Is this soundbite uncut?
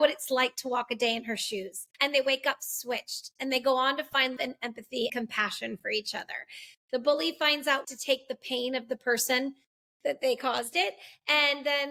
no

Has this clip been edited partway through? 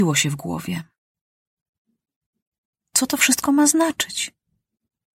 no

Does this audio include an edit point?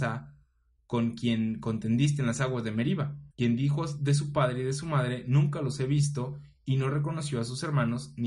yes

